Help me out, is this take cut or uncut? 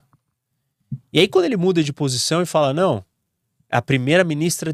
uncut